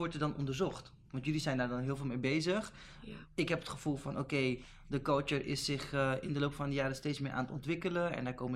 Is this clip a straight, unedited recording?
yes; 0 cuts

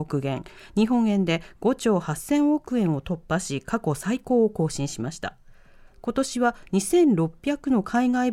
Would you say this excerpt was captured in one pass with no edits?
yes; 0 cuts

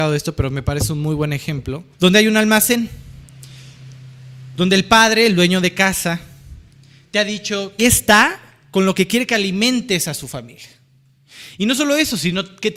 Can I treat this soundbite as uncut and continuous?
no; 2 cuts; at 1.9 s, 7.8 s

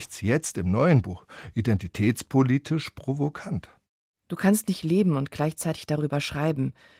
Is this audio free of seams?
yes; 0 cuts

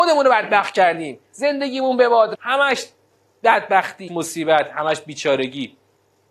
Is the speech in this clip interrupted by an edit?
yes; 3 cuts; at 1.3 s, 2.3 s, 4.1 s

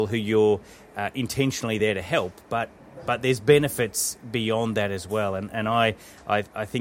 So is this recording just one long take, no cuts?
yes; 0 cuts

